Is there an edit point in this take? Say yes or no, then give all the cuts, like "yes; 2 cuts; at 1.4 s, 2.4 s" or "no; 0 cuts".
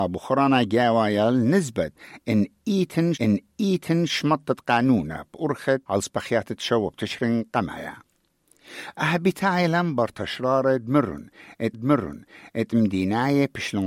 yes; 3 cuts; at 3.2 s, 5.8 s, 11.7 s